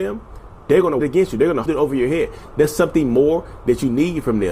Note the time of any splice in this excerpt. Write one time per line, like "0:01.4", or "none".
0:01.0
0:01.7